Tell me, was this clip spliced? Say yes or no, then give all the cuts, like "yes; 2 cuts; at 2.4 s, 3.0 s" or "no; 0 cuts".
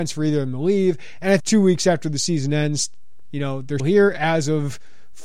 yes; 2 cuts; at 1.4 s, 3.8 s